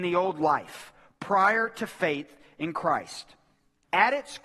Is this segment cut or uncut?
uncut